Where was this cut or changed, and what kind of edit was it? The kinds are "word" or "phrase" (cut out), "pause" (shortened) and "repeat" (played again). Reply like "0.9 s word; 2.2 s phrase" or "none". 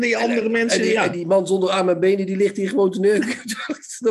none